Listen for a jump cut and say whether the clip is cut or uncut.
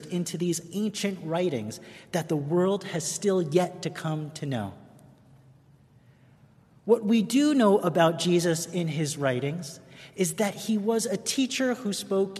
uncut